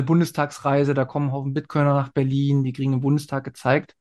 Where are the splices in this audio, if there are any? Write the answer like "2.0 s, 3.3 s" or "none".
none